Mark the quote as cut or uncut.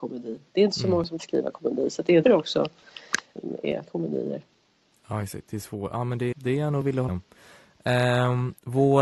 cut